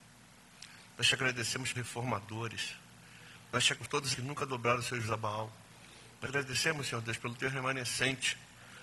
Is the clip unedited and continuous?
no; 5 cuts; at 1.7 s, 3.7 s, 4.1 s, 5.0 s, 6.2 s

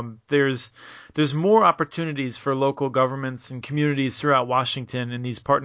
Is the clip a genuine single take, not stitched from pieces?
yes; 0 cuts

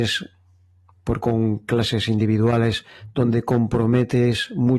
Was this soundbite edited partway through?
yes; 1 cut; at 1.2 s

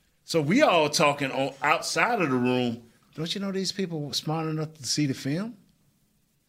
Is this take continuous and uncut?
yes; 0 cuts

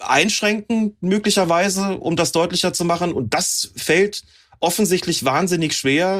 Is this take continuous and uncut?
yes; 0 cuts

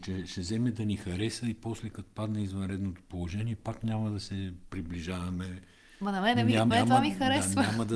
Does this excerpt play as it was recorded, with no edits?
no; 1 cut; at 6.7 s

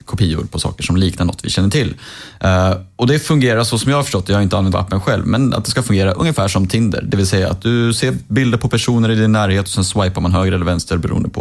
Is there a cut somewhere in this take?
no; 0 cuts

